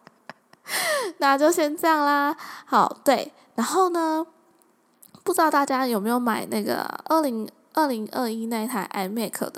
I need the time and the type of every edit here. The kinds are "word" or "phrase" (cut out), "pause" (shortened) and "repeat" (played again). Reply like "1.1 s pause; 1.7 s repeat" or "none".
none